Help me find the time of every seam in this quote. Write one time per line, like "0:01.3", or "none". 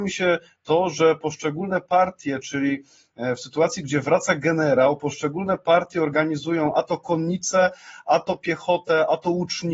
none